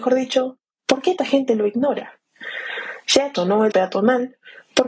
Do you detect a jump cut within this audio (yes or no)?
yes